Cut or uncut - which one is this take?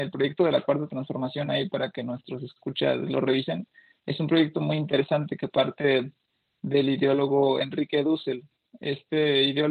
uncut